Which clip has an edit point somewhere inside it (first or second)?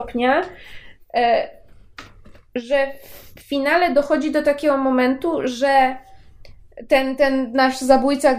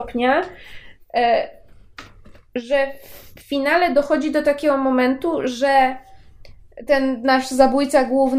second